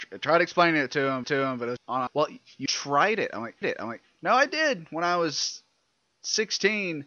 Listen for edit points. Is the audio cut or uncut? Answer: cut